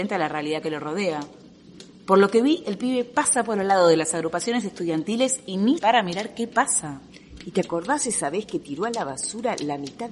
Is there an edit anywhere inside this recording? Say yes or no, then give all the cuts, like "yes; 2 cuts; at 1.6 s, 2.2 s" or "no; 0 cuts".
yes; 1 cut; at 5.8 s